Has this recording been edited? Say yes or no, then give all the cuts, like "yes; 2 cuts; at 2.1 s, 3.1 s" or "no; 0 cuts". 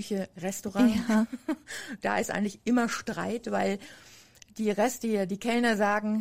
no; 0 cuts